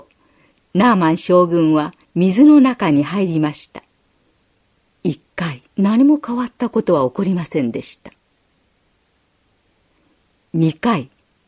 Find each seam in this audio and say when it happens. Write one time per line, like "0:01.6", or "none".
0:02.0
0:04.1
0:05.7

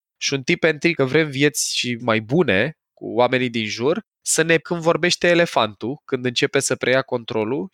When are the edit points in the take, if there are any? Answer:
0:01.0
0:02.0
0:04.1
0:04.6

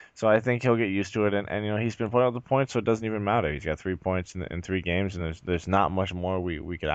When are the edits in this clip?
none

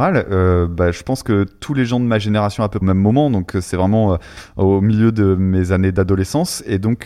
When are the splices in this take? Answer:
0:02.8

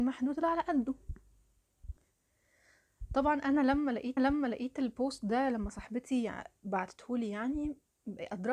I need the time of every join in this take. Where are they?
0:04.2

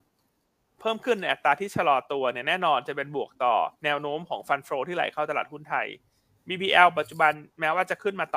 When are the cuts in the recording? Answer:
0:03.8

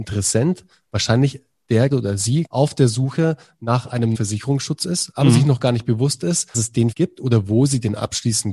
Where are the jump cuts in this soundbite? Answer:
0:01.9
0:02.5
0:04.1
0:06.5
0:06.9

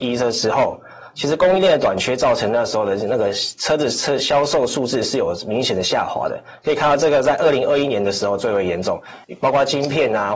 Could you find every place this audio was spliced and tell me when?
0:09.2

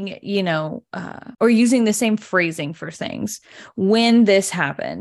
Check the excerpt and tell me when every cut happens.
0:01.3

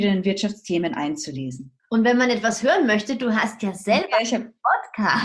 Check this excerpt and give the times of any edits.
0:01.8

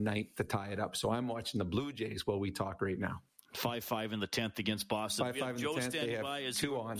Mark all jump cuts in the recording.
0:03.4

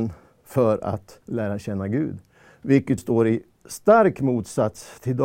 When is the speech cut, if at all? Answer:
0:01.2
0:03.0

